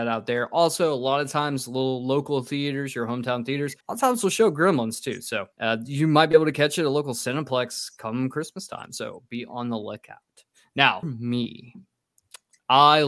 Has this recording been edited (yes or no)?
yes